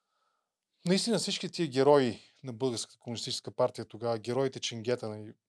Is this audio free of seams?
yes; 0 cuts

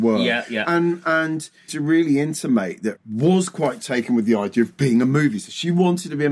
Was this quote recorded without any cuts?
no; 2 cuts; at 1.7 s, 3.0 s

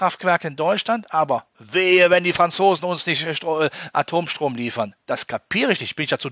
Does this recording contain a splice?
no; 0 cuts

